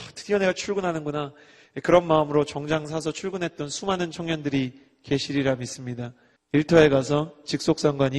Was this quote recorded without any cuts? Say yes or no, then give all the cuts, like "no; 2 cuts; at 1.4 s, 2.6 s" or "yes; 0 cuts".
no; 1 cut; at 6.4 s